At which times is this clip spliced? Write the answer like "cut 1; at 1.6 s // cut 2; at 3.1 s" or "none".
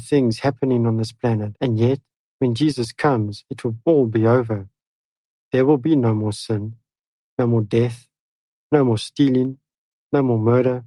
none